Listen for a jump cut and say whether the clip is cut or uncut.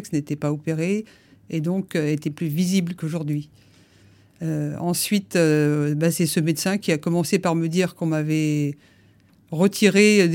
uncut